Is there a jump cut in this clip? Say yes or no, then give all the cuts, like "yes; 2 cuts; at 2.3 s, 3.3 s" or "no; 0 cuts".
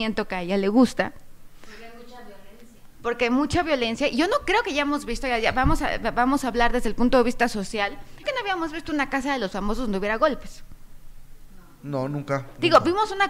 yes; 1 cut; at 8.2 s